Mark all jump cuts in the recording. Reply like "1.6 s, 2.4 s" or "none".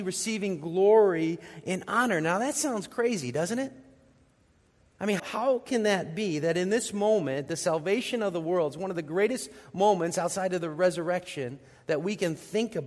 5.2 s